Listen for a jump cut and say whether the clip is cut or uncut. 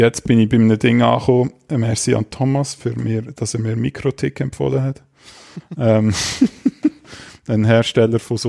uncut